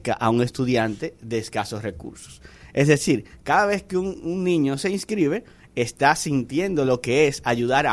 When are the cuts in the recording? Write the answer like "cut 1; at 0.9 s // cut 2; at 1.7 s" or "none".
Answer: none